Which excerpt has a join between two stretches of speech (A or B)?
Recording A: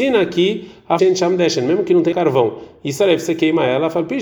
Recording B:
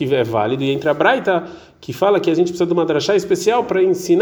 A